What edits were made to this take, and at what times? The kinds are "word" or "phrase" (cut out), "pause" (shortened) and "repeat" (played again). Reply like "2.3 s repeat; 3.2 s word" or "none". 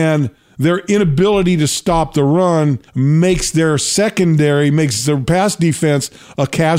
2.9 s pause